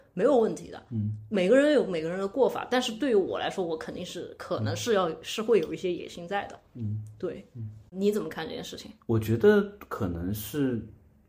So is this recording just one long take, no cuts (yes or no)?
no